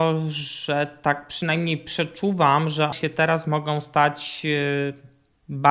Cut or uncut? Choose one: cut